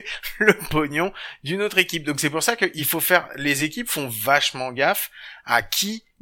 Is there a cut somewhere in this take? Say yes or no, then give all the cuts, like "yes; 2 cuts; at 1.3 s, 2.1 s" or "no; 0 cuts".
no; 0 cuts